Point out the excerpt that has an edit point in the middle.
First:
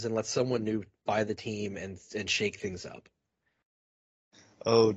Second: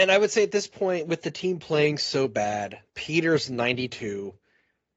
second; 1 cut; at 2.9 s

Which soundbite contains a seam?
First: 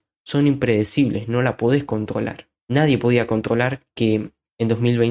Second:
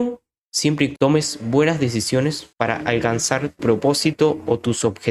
second; 3 cuts; at 1.0 s, 2.5 s, 3.6 s

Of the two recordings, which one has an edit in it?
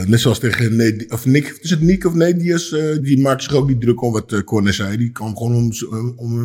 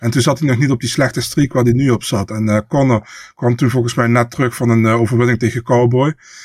first; 1 cut; at 3.0 s

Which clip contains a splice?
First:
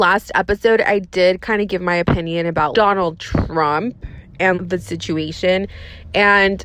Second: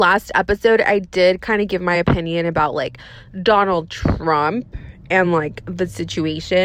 first; 2 cuts; at 2.7 s, 4.5 s

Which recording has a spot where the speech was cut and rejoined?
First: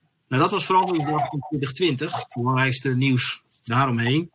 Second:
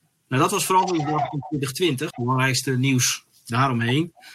second; 1 cut; at 2.1 s

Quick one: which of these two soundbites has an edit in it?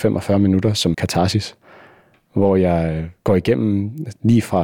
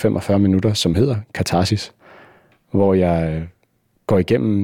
first; 2 cuts; at 0.9 s, 3.2 s

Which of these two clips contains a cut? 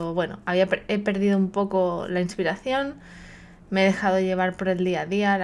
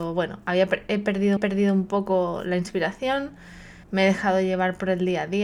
second; 2 cuts; at 1.4 s, 3.8 s

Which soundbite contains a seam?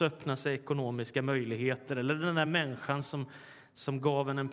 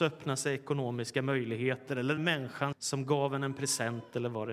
second; 2 cuts; at 2.2 s, 2.7 s

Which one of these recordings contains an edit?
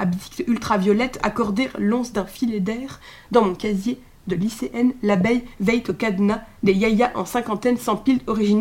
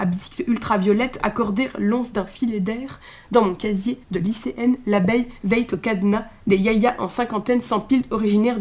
second; 1 cut; at 4.0 s

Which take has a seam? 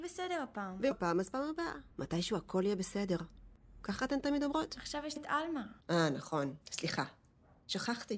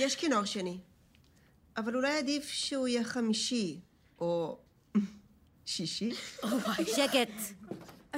first; 5 cuts; at 0.9 s, 1.9 s, 5.2 s, 5.8 s, 6.6 s

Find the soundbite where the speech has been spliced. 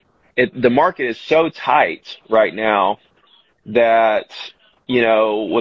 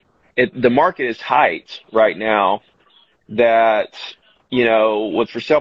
second; 1 cut; at 1.1 s

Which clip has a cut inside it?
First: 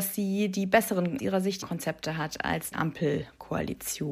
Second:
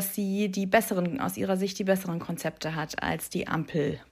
first; 3 cuts; at 1.2 s, 1.6 s, 2.7 s

